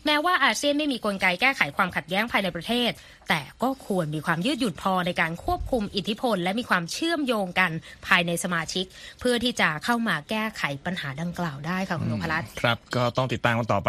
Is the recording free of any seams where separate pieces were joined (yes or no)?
yes